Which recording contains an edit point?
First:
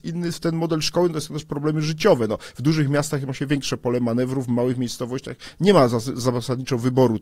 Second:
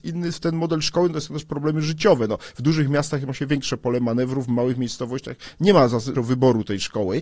second; 1 cut; at 6.1 s

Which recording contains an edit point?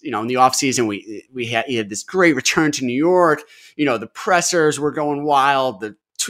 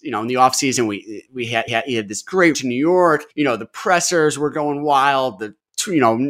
second; 3 cuts; at 1.7 s, 2.5 s, 3.3 s

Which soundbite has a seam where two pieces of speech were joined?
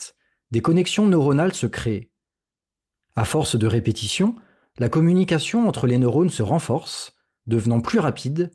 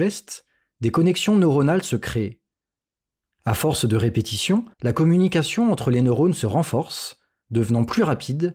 second; 1 cut; at 4.7 s

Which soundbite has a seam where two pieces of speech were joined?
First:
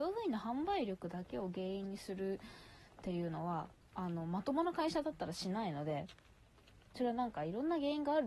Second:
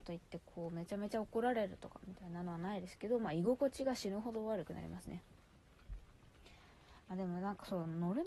first; 2 cuts; at 3.8 s, 6.9 s

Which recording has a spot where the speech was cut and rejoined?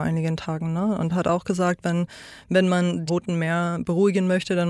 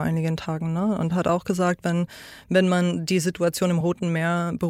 first; 1 cut; at 3.1 s

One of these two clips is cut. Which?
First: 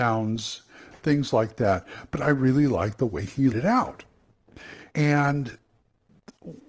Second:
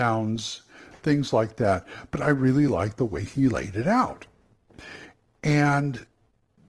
first; 2 cuts; at 3.5 s, 4.9 s

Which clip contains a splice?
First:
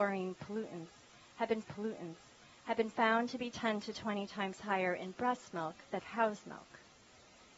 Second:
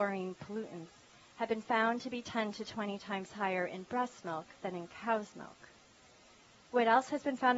first; 2 cuts; at 1.6 s, 6.0 s

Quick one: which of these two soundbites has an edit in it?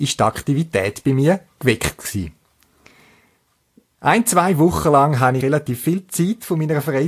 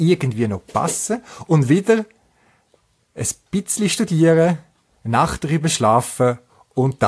first; 1 cut; at 5.4 s

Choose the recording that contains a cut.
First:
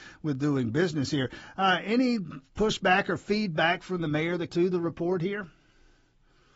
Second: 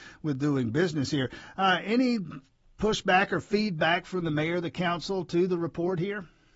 first; 2 cuts; at 2.5 s, 4.5 s

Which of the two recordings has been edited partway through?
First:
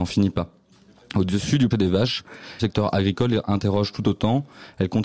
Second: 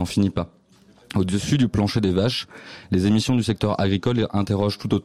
first; 2 cuts; at 1.7 s, 2.6 s

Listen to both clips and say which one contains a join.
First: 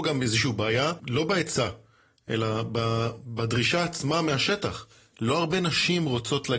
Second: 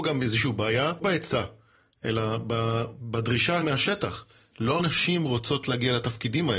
second; 3 cuts; at 1.0 s, 3.6 s, 4.8 s

